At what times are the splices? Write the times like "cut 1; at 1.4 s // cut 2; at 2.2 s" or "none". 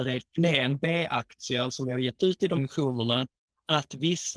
cut 1; at 2.6 s